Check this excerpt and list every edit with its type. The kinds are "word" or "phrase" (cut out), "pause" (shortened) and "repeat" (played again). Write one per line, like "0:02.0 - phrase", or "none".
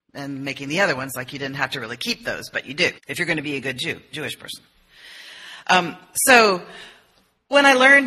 0:03.0 - pause